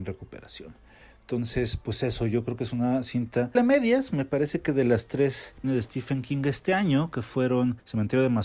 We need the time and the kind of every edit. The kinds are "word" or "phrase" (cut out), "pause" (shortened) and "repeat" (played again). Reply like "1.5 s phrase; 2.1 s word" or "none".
3.6 s word; 5.6 s phrase